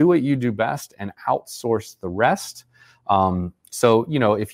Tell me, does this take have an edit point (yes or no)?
no